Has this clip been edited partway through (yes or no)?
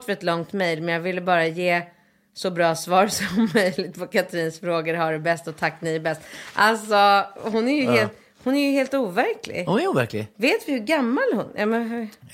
no